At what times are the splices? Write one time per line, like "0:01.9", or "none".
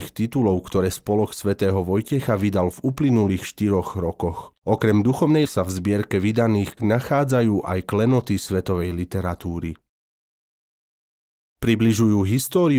0:04.6
0:05.5
0:06.8